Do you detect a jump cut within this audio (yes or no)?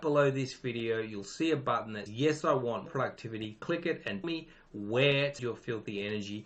yes